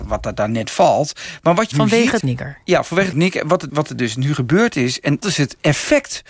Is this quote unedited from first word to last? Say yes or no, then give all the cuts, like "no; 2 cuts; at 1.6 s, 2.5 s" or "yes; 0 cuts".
no; 5 cuts; at 1.7 s, 2.2 s, 3.1 s, 3.7 s, 5.2 s